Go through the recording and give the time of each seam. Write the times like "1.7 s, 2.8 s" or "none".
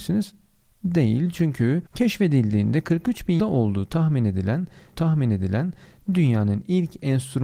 1.9 s, 3.4 s, 4.9 s